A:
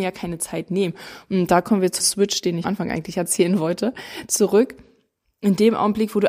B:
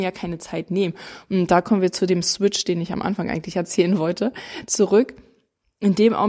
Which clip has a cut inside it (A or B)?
A